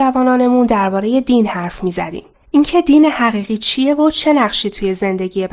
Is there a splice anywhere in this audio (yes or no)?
yes